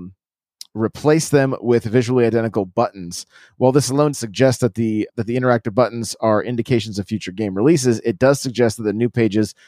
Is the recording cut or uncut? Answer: cut